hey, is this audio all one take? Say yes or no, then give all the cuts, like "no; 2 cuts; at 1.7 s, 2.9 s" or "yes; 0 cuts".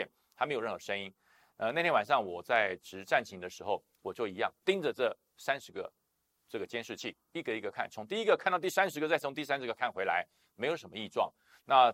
yes; 0 cuts